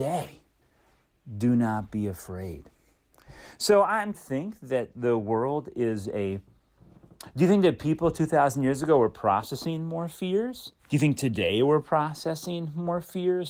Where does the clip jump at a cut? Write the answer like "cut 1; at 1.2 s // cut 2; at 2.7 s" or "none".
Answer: cut 1; at 4.1 s // cut 2; at 10.8 s